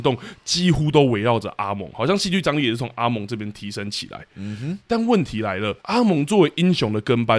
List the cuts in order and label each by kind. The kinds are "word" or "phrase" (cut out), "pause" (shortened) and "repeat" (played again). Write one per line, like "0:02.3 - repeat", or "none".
0:05.8 - pause